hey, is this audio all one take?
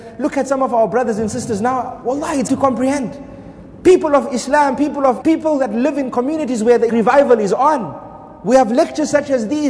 no; 3 cuts; at 2.5 s, 5.2 s, 6.9 s

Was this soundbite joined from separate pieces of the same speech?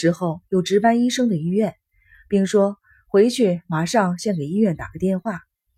no; 0 cuts

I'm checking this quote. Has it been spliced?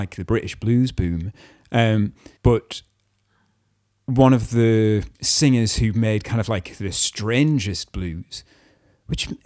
yes; 2 cuts; at 2.4 s, 5.1 s

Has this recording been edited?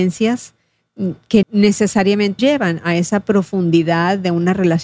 yes; 2 cuts; at 1.4 s, 2.4 s

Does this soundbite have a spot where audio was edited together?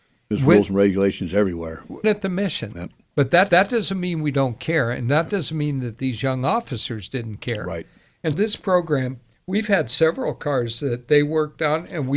yes; 3 cuts; at 2.0 s, 3.5 s, 8.3 s

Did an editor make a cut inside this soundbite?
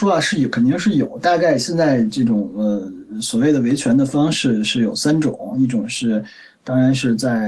no; 0 cuts

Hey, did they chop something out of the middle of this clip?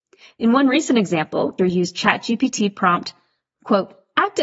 yes; 1 cut; at 1.6 s

